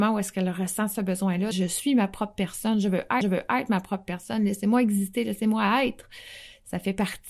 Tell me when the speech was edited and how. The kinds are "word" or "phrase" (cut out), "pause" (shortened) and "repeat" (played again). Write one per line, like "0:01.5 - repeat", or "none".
0:01.5 - word
0:03.2 - repeat